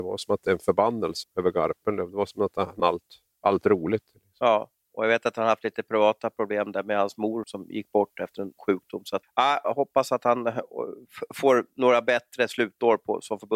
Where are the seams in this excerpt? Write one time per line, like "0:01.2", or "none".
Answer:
0:01.2
0:02.8
0:07.4
0:08.6
0:09.2